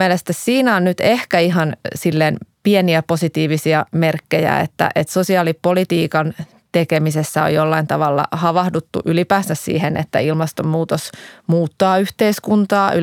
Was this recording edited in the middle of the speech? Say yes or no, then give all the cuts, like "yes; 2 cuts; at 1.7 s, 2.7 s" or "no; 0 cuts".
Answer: no; 0 cuts